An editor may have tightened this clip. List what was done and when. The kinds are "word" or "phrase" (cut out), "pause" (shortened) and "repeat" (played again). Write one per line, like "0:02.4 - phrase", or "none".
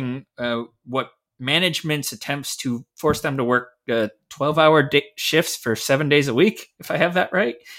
none

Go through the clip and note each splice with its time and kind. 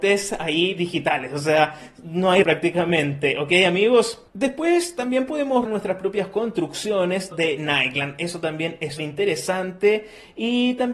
0:02.4 - word
0:04.3 - pause
0:05.7 - word
0:07.3 - word
0:09.0 - word

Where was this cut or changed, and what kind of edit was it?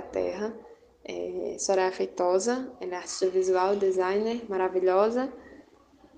none

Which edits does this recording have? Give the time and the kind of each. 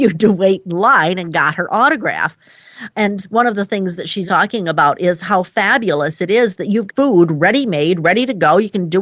0:03.2 - word
0:04.3 - word
0:06.9 - phrase

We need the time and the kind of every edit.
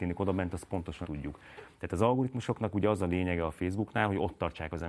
0:01.0 - word

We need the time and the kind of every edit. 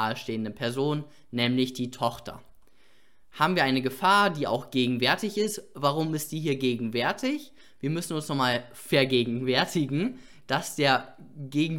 none

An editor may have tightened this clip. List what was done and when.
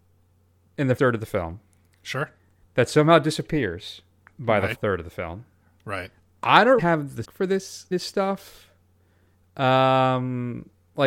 0:01.0 - word
0:04.3 - word
0:04.7 - word
0:06.8 - word
0:07.2 - word
0:07.9 - word

